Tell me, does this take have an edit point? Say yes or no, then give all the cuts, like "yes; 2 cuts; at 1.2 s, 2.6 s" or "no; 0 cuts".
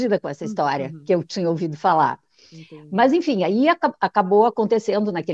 no; 0 cuts